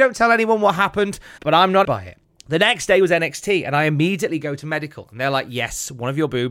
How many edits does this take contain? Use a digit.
3